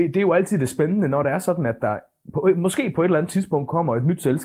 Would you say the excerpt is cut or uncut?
uncut